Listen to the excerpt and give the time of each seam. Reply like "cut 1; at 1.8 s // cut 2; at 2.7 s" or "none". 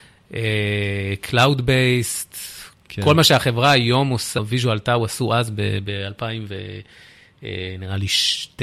cut 1; at 4.4 s